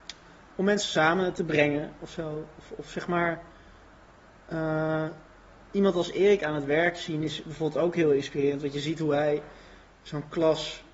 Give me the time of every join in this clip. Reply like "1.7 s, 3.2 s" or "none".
none